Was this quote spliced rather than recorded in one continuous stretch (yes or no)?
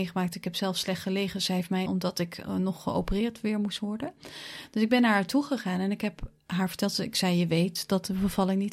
yes